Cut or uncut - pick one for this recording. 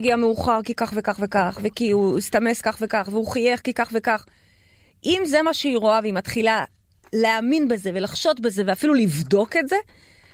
uncut